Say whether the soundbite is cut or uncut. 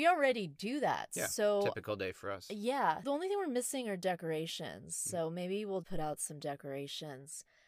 cut